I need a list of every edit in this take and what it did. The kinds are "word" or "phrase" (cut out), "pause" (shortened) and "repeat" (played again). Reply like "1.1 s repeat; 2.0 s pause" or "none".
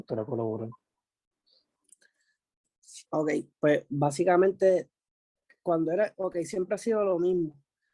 3.1 s pause